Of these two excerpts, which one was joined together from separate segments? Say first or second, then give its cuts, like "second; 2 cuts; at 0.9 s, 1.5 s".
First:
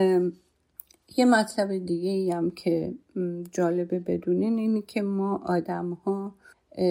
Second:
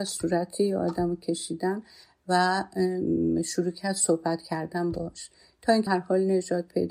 second; 1 cut; at 5.9 s